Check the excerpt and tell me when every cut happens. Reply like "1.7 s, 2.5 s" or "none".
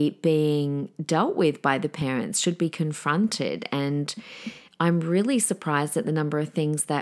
none